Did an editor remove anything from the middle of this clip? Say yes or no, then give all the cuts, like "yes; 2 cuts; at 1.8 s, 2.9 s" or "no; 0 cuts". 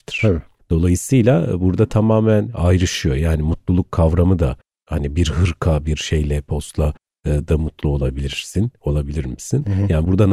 no; 0 cuts